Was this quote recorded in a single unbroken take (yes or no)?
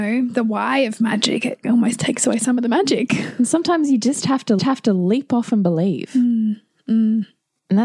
no